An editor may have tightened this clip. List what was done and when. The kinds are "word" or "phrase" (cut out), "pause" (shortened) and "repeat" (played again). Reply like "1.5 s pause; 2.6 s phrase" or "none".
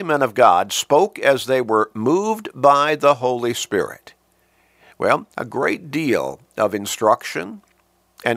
5.3 s pause